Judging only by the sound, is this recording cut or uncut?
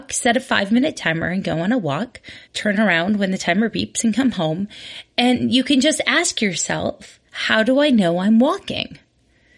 cut